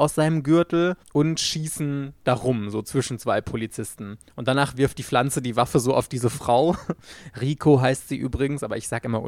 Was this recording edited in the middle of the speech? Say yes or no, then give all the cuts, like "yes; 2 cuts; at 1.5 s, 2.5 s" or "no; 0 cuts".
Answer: yes; 1 cut; at 1.0 s